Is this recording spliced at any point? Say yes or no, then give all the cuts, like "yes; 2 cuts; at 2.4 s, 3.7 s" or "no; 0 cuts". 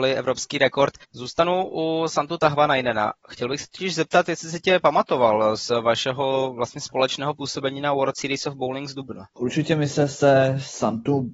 yes; 1 cut; at 9.3 s